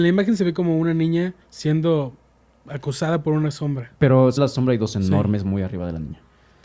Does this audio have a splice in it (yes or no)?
yes